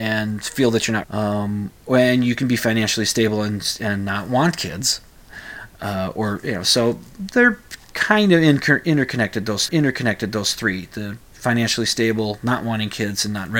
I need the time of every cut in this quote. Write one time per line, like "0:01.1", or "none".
0:01.0
0:09.7